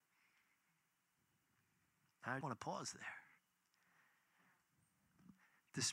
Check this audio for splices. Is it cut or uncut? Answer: cut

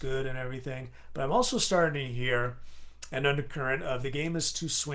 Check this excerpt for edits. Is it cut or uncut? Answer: uncut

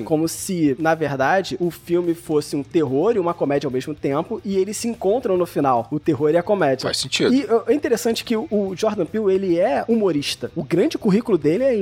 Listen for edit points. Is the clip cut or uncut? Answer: uncut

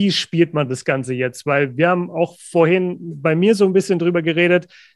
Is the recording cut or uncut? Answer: uncut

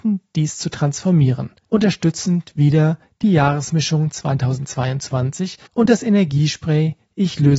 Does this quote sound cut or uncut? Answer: cut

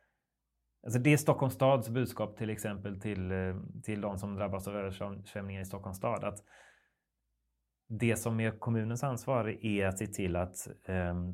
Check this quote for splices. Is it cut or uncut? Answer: uncut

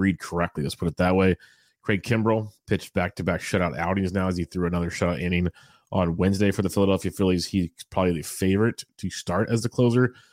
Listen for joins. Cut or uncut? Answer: uncut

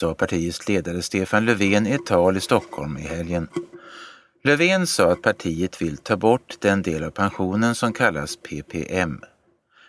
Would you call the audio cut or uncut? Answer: uncut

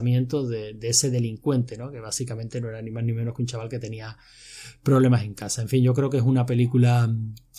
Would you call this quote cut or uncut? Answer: uncut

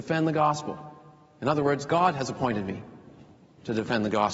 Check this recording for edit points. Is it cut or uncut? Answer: uncut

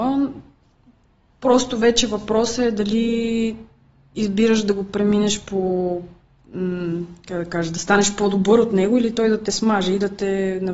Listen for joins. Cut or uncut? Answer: uncut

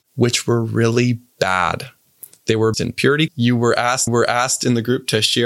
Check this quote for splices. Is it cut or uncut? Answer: cut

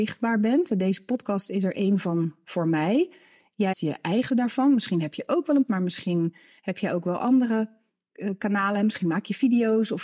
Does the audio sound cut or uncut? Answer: cut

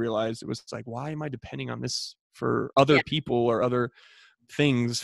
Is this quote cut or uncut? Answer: uncut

